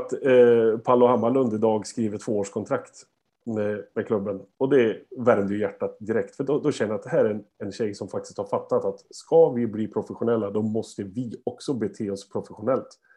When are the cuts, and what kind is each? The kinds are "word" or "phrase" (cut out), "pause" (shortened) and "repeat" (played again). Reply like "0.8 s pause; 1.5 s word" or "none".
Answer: 4.5 s pause